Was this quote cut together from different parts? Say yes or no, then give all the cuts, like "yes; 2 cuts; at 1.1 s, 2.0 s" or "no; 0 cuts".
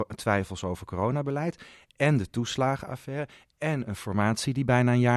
no; 0 cuts